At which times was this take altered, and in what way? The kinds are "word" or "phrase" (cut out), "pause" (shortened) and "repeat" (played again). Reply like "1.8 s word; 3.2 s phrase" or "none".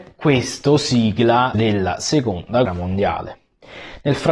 1.5 s word; 2.7 s word